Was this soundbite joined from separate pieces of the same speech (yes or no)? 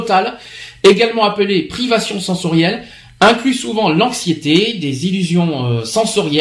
no